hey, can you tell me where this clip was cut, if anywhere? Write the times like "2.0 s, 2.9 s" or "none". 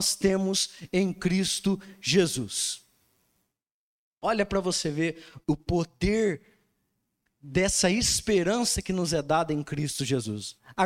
5.4 s